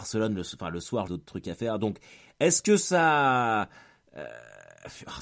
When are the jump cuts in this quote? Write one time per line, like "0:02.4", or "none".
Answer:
0:01.1